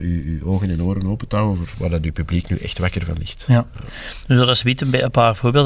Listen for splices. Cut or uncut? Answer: uncut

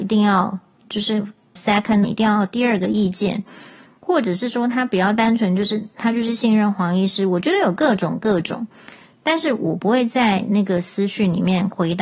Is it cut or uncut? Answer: cut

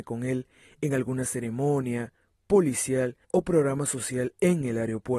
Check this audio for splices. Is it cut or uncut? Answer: cut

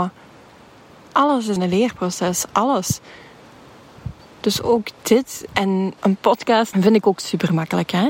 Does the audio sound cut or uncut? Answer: cut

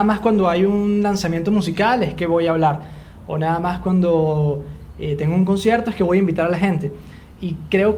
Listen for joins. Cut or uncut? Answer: uncut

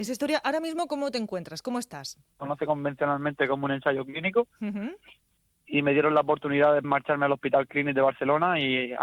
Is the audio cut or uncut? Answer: cut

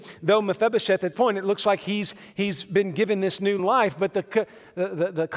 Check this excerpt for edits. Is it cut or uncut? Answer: cut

